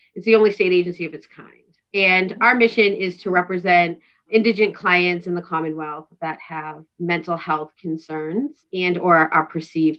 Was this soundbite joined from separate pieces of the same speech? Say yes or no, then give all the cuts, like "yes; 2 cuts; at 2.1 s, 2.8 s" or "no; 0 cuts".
no; 0 cuts